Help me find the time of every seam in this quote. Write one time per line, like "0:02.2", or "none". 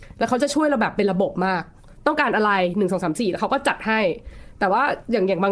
none